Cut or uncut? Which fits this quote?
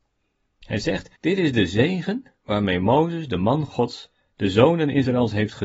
cut